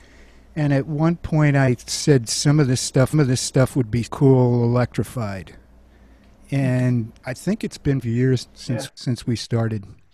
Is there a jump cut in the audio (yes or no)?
yes